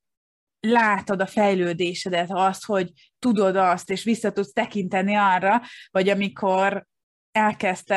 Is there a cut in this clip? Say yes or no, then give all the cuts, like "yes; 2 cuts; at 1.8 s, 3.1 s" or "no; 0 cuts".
no; 0 cuts